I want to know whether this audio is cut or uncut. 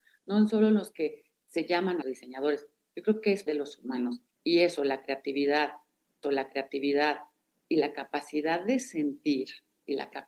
cut